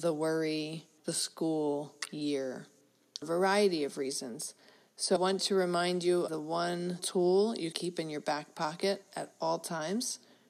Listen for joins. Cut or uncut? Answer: cut